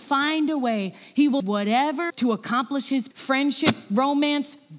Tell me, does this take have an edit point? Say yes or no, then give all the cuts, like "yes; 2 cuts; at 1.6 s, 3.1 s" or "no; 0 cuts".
yes; 3 cuts; at 1.4 s, 2.1 s, 3.1 s